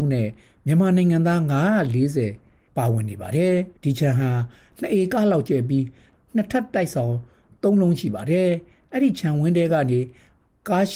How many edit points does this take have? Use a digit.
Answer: 1